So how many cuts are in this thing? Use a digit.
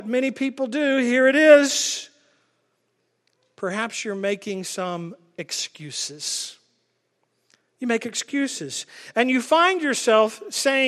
0